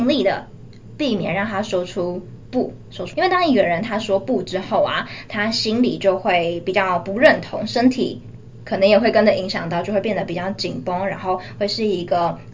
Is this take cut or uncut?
cut